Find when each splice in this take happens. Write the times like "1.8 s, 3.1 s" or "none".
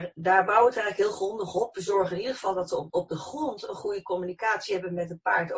2.9 s